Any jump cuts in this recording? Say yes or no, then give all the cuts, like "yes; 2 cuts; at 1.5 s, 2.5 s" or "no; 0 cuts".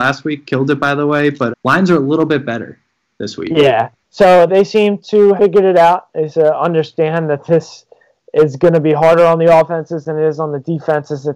yes; 4 cuts; at 1.5 s, 4.5 s, 5.4 s, 6.3 s